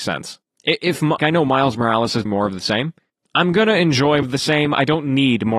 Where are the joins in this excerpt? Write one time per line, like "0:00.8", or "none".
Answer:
0:01.2
0:02.3
0:04.2